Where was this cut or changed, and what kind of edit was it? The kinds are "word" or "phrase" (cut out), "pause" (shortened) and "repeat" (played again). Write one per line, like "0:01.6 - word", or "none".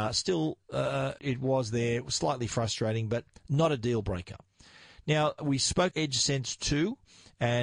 0:01.2 - word
0:05.4 - word
0:05.9 - word